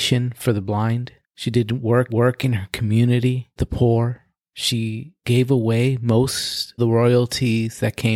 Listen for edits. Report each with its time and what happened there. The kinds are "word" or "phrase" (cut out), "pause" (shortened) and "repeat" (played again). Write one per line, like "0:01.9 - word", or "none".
0:01.2 - pause
0:02.1 - repeat
0:03.6 - word
0:05.2 - pause
0:06.8 - word